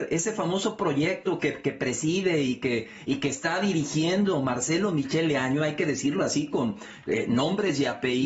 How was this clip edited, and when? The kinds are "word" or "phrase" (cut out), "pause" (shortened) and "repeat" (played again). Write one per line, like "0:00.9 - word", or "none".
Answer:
none